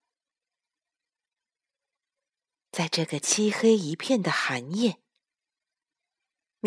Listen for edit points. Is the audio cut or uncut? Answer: uncut